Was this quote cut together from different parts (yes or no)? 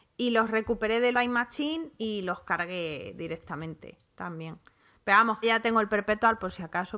yes